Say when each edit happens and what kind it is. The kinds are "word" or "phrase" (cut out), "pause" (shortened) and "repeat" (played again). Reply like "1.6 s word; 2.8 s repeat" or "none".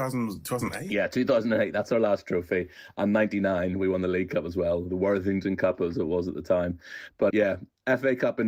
7.3 s word